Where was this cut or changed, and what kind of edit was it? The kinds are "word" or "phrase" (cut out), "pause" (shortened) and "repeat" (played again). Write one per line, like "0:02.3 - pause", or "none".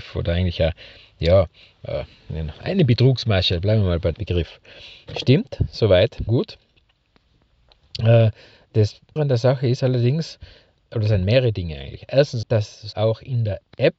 0:02.5 - word
0:04.1 - word
0:06.3 - word
0:09.2 - word
0:10.8 - word
0:12.4 - word
0:12.9 - word

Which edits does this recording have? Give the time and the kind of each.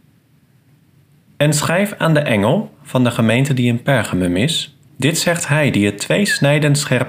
0:04.8 - pause

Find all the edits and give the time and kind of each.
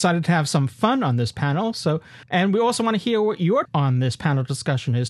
0:02.2 - pause
0:03.6 - word

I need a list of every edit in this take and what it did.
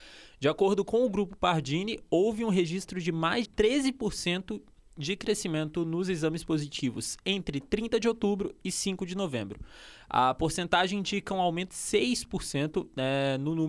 0:03.4 - word
0:11.7 - word

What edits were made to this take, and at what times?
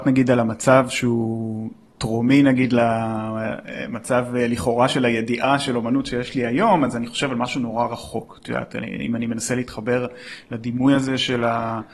none

